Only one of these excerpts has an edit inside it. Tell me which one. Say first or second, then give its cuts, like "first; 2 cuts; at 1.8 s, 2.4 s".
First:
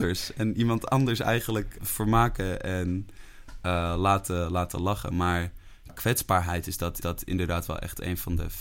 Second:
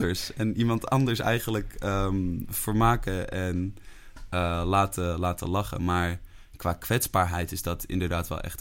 first; 3 cuts; at 1.8 s, 5.9 s, 7.0 s